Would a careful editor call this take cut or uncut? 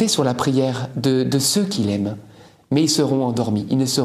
uncut